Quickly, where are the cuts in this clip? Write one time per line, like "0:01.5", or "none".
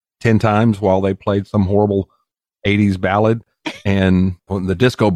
none